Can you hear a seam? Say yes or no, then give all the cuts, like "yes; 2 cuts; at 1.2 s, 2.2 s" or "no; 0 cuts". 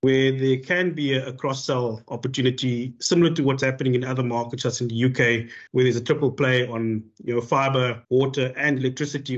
yes; 2 cuts; at 5.7 s, 8.0 s